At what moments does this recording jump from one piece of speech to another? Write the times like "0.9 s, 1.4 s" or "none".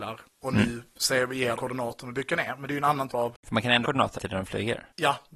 1.6 s, 3.1 s, 3.8 s, 4.2 s